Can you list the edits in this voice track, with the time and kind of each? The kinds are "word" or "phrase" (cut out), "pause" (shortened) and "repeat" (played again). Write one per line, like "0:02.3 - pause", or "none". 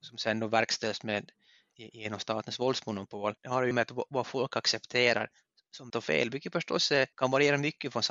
0:03.4 - pause
0:03.7 - word
0:05.9 - word
0:07.1 - pause